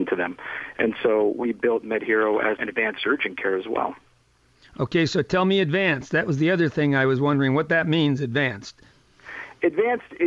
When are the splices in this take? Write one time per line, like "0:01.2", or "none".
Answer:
0:02.6